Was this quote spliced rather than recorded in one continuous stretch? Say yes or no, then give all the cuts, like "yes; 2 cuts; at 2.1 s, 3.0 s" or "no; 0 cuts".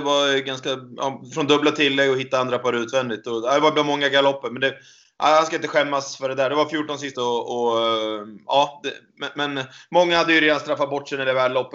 yes; 1 cut; at 7.1 s